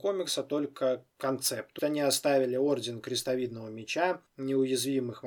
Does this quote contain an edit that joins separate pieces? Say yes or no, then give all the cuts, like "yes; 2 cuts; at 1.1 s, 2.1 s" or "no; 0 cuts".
yes; 2 cuts; at 1.8 s, 4.3 s